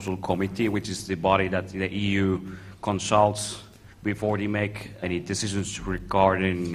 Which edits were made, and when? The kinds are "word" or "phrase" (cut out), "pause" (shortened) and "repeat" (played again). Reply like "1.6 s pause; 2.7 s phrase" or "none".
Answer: 3.9 s pause; 5.0 s word